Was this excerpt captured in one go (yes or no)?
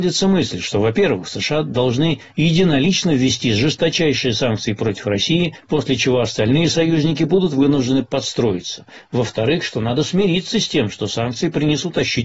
yes